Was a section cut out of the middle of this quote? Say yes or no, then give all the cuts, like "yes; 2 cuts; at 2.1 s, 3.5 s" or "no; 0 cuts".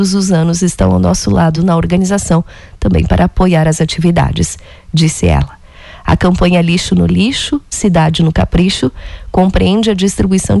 no; 0 cuts